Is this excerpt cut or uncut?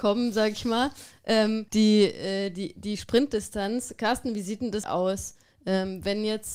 cut